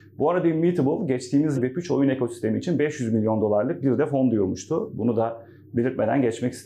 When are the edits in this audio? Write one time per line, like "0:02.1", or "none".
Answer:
0:01.5